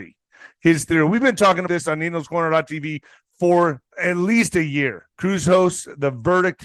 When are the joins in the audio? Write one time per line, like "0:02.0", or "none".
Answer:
0:01.7
0:03.9
0:05.1